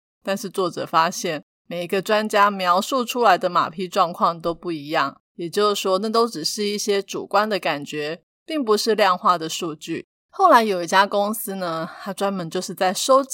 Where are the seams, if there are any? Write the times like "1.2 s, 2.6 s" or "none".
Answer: 5.2 s